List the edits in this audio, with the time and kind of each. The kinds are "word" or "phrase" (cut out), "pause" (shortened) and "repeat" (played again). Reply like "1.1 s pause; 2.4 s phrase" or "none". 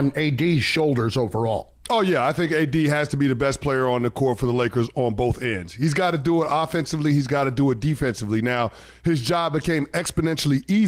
none